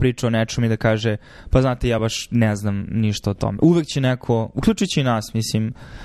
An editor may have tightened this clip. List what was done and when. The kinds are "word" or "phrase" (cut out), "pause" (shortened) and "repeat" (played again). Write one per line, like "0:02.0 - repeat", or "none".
none